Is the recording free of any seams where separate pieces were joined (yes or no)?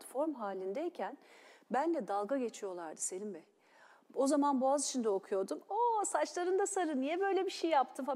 yes